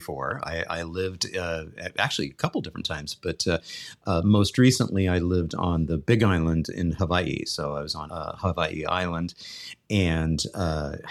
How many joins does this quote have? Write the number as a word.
one